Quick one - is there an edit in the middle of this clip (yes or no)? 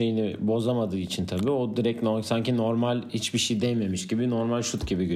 no